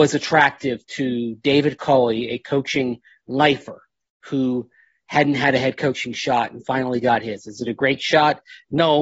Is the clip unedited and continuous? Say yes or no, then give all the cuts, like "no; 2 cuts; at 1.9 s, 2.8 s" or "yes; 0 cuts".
yes; 0 cuts